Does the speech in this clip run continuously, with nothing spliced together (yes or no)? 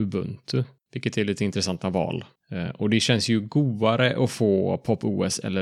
yes